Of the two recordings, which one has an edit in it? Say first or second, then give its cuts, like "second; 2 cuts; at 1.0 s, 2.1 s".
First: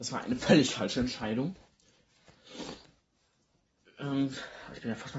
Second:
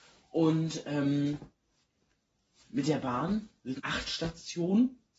second; 2 cuts; at 2.6 s, 3.8 s